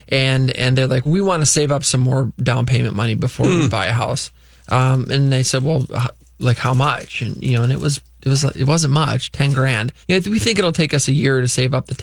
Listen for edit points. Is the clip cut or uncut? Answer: cut